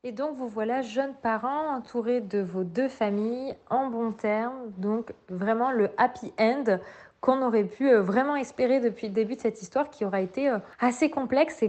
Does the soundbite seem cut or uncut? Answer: uncut